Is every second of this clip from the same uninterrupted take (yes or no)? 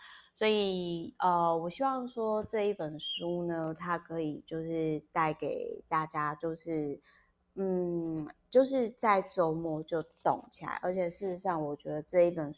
yes